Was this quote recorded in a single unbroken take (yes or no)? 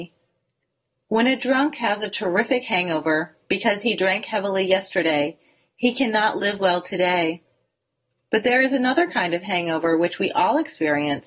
yes